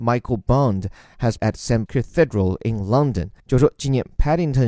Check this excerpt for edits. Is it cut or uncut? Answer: cut